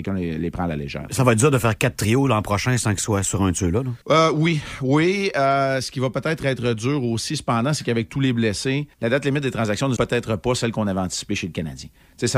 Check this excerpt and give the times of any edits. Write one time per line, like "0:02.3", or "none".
0:04.0
0:08.9
0:10.0